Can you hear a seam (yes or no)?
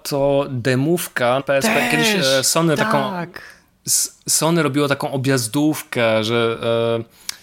yes